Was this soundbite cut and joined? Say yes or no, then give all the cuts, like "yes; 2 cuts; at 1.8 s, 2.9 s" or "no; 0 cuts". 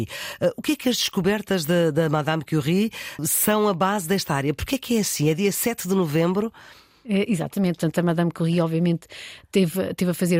no; 0 cuts